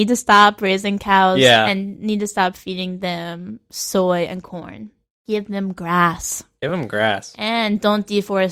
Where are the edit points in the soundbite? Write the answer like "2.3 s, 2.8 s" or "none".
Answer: none